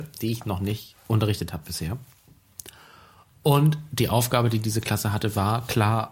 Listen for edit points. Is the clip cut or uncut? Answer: uncut